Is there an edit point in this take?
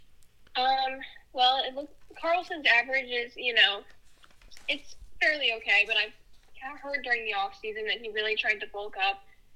no; 0 cuts

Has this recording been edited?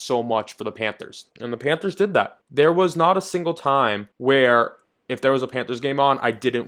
yes; 3 cuts; at 1.3 s, 2.4 s, 4.1 s

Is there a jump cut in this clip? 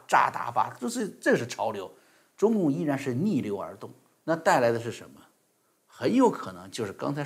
no; 0 cuts

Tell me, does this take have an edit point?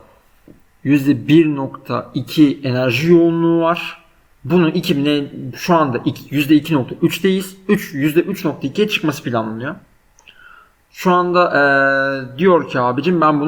no; 0 cuts

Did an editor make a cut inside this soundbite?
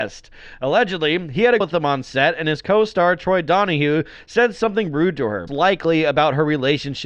yes; 2 cuts; at 1.6 s, 5.5 s

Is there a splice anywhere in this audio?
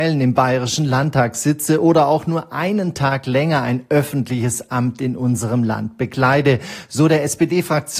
no; 0 cuts

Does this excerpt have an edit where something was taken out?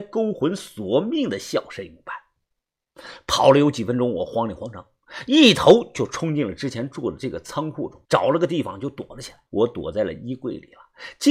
yes; 2 cuts; at 8.0 s, 9.5 s

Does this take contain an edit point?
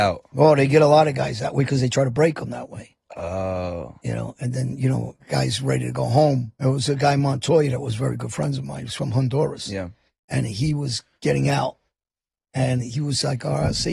yes; 2 cuts; at 4.0 s, 6.5 s

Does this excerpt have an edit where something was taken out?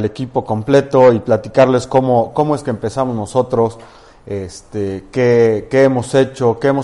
no; 0 cuts

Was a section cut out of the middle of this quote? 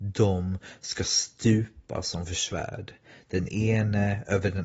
no; 0 cuts

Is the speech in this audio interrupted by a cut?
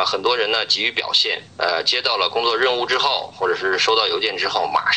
yes; 1 cut; at 1.5 s

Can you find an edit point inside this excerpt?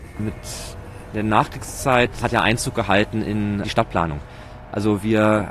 yes; 2 cuts; at 2.2 s, 3.6 s

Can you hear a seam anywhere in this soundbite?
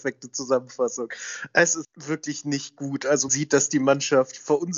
yes; 2 cuts; at 1.8 s, 3.3 s

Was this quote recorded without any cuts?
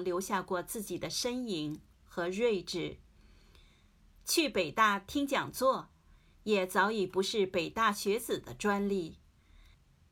yes; 0 cuts

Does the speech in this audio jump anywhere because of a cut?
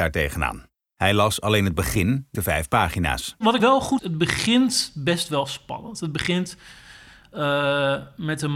yes; 3 cuts; at 2.3 s, 3.6 s, 4.0 s

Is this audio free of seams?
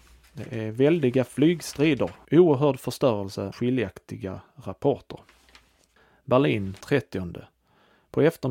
no; 3 cuts; at 2.2 s, 3.5 s, 6.8 s

